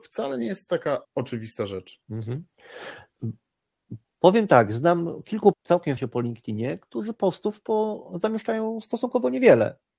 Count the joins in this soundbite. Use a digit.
4